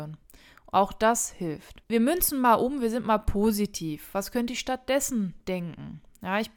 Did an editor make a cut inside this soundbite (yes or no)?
no